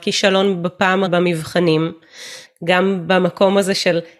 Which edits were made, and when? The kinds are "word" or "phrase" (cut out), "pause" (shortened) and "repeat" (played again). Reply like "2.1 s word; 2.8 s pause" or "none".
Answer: 1.1 s word; 2.5 s phrase